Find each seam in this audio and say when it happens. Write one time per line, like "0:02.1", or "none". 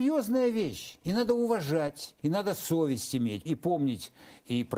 0:01.0
0:02.2
0:03.5